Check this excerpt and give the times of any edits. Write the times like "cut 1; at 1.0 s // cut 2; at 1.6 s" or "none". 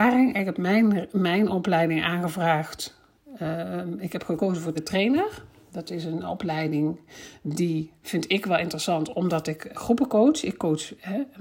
cut 1; at 4.7 s // cut 2; at 9.7 s